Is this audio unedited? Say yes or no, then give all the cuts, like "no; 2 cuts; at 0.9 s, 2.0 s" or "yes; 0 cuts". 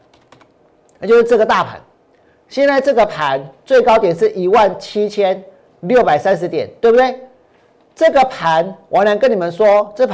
yes; 0 cuts